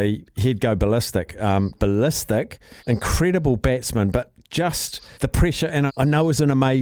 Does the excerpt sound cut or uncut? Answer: cut